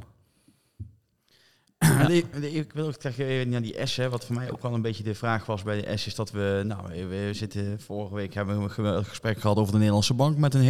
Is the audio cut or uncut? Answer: uncut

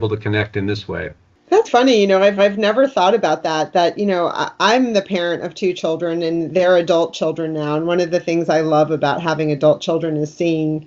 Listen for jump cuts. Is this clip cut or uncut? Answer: cut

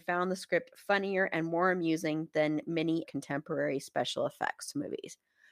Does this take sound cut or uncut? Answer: cut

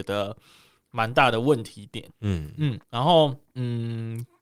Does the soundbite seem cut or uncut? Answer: cut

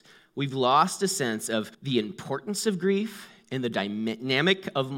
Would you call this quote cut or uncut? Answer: cut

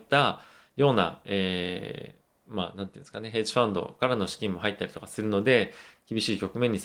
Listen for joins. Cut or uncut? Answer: uncut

